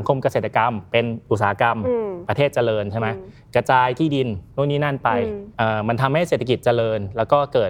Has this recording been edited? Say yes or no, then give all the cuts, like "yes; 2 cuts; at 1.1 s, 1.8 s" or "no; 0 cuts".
yes; 1 cut; at 4.5 s